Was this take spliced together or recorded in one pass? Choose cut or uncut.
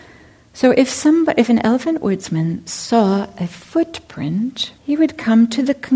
cut